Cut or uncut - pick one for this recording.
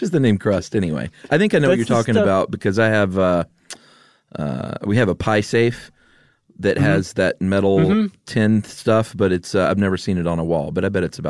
uncut